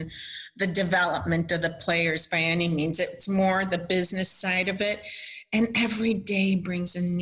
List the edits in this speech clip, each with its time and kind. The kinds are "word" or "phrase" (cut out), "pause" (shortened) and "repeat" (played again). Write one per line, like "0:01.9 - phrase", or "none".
none